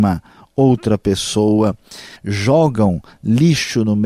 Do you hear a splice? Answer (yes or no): yes